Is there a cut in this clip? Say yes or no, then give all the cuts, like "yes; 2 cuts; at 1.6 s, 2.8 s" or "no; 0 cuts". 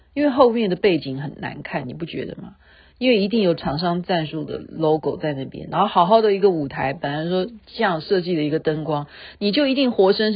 no; 0 cuts